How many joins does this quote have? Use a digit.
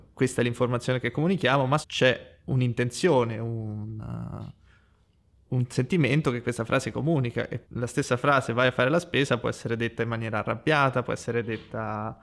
2